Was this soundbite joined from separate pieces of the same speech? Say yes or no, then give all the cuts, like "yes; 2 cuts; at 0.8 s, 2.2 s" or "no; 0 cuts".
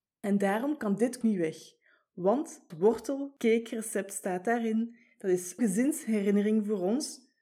yes; 3 cuts; at 1.2 s, 2.7 s, 5.6 s